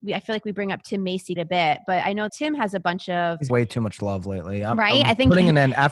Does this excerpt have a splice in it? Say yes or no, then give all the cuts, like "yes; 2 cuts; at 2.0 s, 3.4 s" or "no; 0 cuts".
yes; 3 cuts; at 1.4 s, 2.3 s, 3.5 s